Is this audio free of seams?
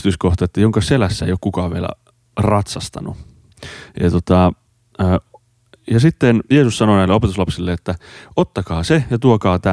yes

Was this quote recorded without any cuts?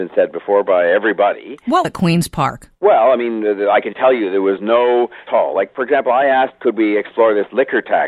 no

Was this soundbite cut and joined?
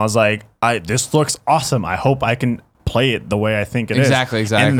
no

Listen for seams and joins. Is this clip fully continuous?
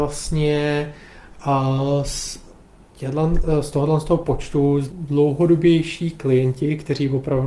no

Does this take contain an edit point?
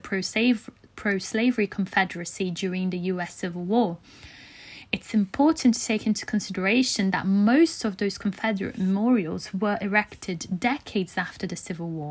no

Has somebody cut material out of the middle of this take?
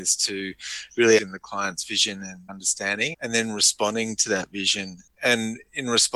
yes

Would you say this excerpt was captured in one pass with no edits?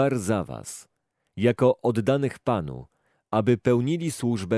yes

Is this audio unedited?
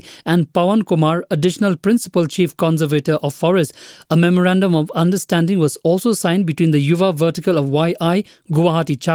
yes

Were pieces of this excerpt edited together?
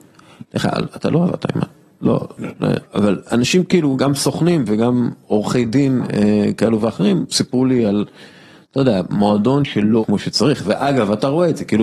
yes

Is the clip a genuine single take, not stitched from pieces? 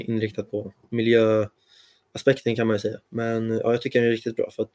no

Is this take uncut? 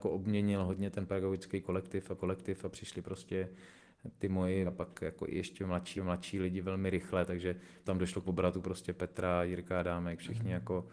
no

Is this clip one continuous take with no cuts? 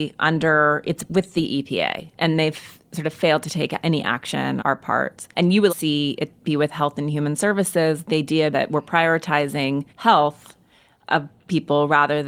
no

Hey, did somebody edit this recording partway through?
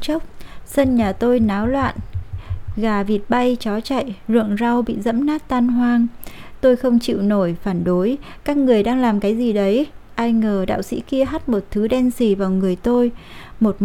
no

